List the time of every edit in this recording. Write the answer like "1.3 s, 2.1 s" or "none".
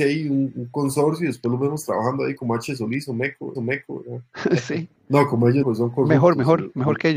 3.6 s, 5.0 s, 5.6 s